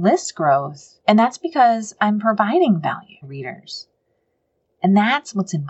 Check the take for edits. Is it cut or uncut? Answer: cut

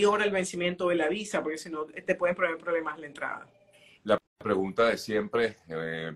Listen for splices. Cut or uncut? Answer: cut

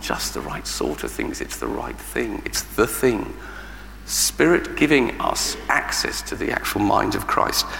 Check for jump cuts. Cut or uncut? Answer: uncut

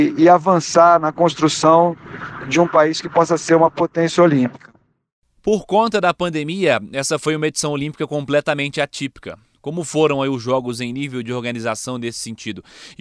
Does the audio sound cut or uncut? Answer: uncut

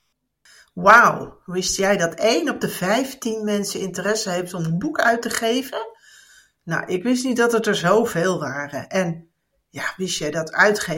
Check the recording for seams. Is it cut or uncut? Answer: uncut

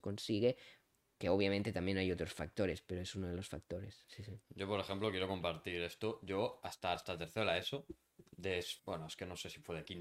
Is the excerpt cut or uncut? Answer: cut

